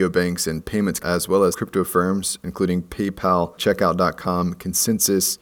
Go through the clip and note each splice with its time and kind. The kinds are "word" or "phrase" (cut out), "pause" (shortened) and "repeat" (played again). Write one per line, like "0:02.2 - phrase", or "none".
0:01.0 - word
0:01.5 - word
0:03.6 - phrase